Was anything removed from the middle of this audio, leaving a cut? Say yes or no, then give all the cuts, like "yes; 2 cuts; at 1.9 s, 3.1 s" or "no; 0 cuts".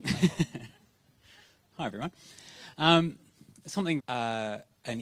yes; 1 cut; at 4.0 s